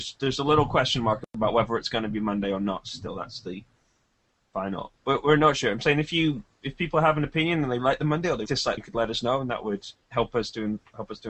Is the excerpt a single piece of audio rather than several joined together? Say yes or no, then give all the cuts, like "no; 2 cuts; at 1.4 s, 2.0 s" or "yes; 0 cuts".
no; 5 cuts; at 5.0 s, 7.8 s, 8.5 s, 8.8 s, 9.9 s